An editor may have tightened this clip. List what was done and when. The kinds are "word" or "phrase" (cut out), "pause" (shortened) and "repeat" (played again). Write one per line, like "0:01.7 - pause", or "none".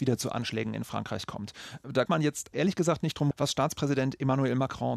0:02.1 - word
0:02.5 - word
0:03.3 - word